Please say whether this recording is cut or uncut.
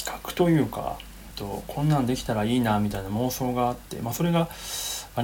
cut